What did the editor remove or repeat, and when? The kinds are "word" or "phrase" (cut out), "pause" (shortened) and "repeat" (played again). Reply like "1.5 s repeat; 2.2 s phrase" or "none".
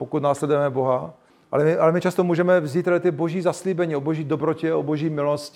1.3 s pause